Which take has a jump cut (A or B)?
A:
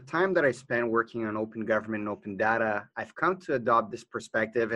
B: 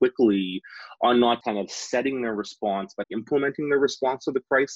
B